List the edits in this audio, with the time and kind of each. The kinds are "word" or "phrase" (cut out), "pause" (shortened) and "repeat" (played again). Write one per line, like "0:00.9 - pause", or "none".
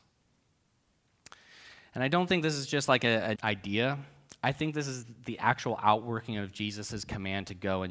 0:03.4 - word

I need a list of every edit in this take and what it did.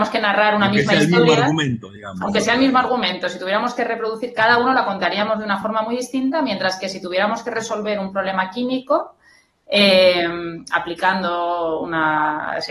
none

